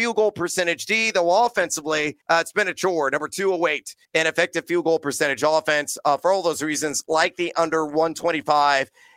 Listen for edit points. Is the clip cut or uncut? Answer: cut